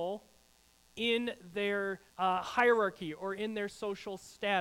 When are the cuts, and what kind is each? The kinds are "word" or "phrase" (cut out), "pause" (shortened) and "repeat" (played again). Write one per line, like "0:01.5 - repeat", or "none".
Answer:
0:02.1 - pause